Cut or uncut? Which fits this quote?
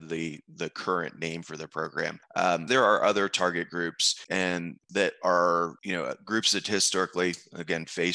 cut